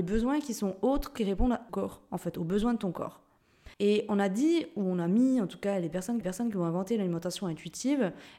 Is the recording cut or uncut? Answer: cut